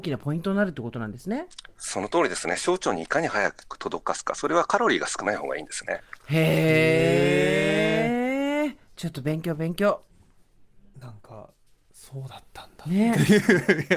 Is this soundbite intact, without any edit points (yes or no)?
yes